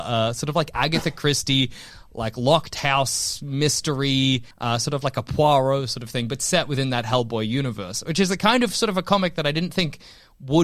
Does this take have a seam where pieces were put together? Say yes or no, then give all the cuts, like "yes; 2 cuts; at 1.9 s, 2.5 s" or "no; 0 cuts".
yes; 1 cut; at 4.5 s